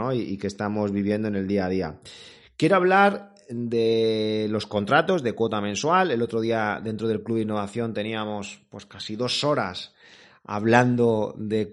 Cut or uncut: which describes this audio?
uncut